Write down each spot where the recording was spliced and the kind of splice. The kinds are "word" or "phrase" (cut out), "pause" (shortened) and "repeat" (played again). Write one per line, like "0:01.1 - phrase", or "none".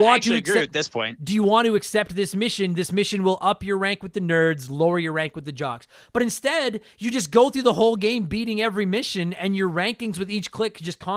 none